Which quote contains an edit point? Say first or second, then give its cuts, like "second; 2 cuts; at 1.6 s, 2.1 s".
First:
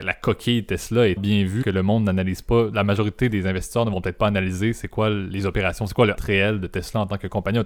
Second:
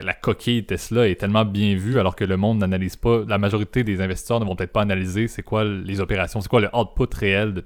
first; 3 cuts; at 1.2 s, 1.6 s, 6.2 s